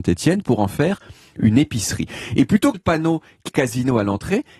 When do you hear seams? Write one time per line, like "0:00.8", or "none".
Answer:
0:02.7
0:03.5

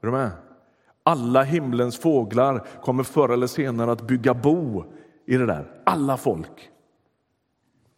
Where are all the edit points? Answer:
none

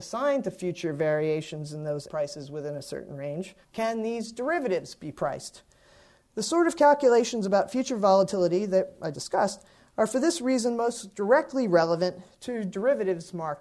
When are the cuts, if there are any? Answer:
0:02.1
0:03.6
0:09.1

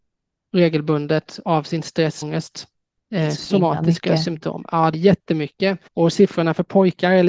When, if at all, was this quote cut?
0:02.2
0:03.0
0:04.9
0:05.9

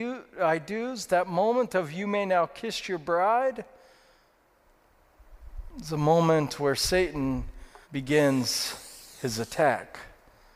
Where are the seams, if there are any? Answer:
0:07.8

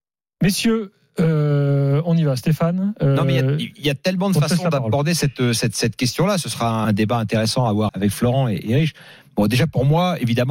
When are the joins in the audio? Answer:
0:06.8
0:07.9

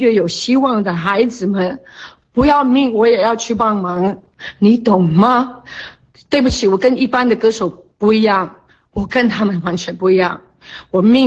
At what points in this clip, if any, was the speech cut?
none

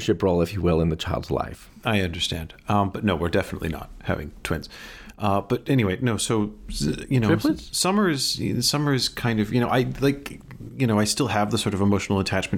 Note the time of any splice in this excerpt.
none

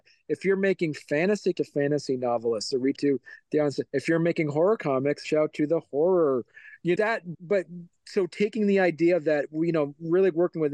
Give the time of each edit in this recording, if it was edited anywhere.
0:01.5
0:03.0
0:03.9
0:05.2
0:07.0
0:07.3

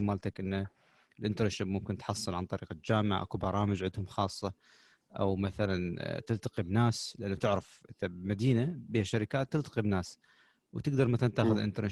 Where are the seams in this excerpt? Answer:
none

